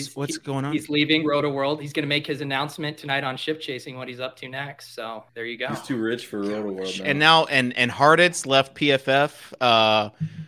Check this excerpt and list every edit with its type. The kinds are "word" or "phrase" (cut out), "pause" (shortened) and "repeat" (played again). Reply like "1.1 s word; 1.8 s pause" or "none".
5.3 s pause